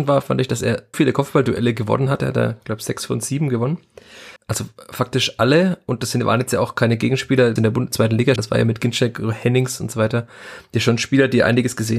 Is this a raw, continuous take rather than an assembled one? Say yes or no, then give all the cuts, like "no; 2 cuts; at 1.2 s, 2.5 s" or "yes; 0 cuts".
no; 4 cuts; at 0.9 s, 4.4 s, 7.6 s, 8.4 s